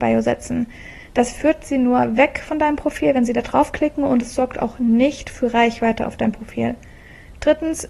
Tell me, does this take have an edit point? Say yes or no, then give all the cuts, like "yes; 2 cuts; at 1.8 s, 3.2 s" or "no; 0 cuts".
no; 0 cuts